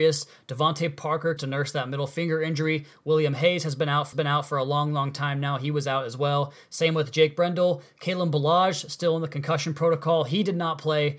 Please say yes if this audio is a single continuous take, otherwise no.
no